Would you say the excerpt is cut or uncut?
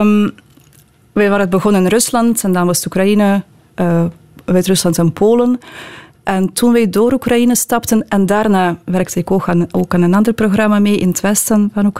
uncut